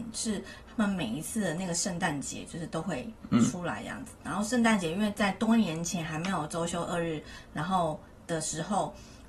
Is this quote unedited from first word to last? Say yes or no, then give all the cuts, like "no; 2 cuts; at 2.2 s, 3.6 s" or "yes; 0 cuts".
yes; 0 cuts